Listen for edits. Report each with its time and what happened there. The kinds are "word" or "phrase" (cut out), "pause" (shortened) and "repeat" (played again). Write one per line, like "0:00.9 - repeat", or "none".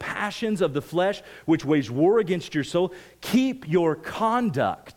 none